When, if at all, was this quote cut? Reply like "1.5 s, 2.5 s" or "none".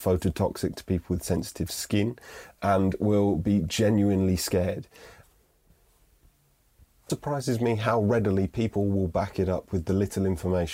2.6 s, 7.1 s